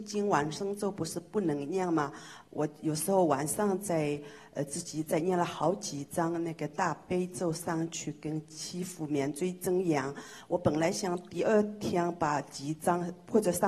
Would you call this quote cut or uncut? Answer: uncut